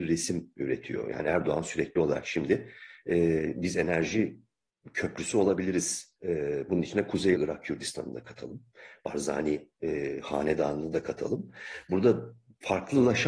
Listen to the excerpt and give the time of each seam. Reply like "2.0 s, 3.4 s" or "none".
6.2 s, 7.3 s